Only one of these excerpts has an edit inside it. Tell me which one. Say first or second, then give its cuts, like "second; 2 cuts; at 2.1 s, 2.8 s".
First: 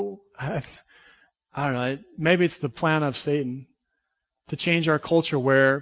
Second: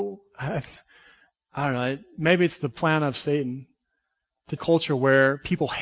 second; 1 cut; at 4.6 s